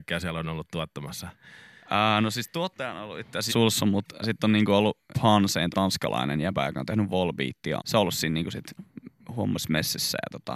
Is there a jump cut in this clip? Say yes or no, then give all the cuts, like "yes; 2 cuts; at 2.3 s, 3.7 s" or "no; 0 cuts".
yes; 6 cuts; at 3.5 s, 4.2 s, 5.1 s, 5.7 s, 7.8 s, 8.8 s